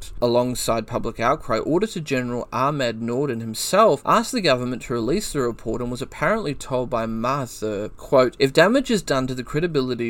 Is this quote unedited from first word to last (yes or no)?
yes